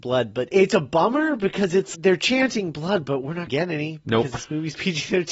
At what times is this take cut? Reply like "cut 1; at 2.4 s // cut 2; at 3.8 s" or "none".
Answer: cut 1; at 1.9 s // cut 2; at 3.5 s